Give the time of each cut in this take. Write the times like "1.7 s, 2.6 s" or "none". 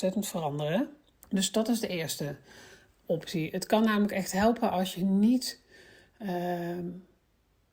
1.1 s